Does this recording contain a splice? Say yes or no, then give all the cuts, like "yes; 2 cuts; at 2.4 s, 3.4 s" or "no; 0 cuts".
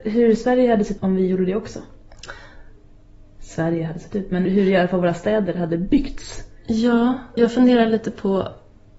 yes; 3 cuts; at 1.0 s, 4.5 s, 7.4 s